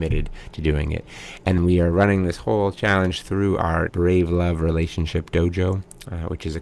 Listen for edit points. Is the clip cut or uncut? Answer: cut